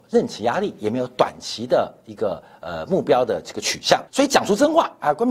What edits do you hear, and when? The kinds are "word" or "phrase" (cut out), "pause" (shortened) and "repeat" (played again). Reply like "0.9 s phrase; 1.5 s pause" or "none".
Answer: 4.1 s pause